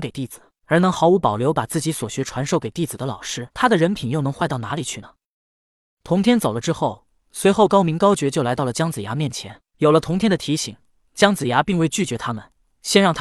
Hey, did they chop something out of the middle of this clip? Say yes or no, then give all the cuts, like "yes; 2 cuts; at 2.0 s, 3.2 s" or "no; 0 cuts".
yes; 1 cut; at 3.5 s